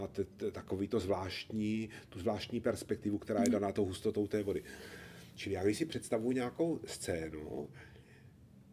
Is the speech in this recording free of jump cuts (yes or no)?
yes